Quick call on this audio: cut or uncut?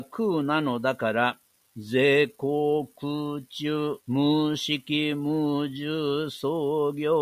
cut